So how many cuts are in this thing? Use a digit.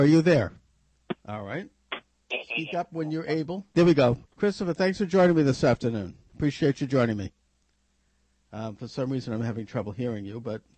3